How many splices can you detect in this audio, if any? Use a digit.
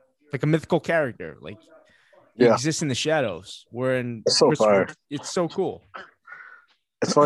0